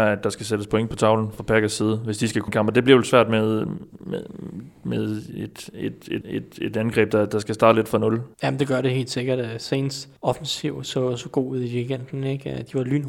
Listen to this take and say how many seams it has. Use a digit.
5